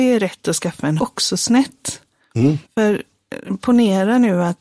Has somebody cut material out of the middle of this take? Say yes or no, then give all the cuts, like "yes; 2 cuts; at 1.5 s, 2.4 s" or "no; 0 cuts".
yes; 2 cuts; at 1.0 s, 2.6 s